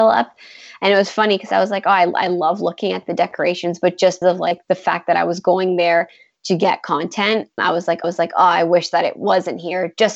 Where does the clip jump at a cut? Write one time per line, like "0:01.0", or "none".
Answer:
0:04.2
0:07.6
0:08.0